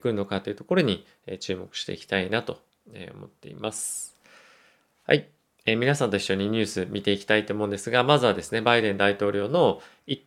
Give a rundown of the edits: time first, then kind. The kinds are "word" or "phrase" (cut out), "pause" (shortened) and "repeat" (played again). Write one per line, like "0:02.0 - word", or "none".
none